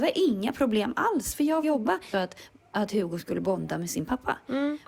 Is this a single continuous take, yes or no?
no